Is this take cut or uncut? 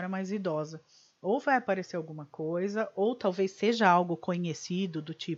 uncut